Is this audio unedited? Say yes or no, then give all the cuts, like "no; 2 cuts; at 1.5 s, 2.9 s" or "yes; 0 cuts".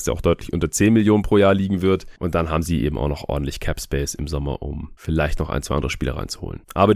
yes; 0 cuts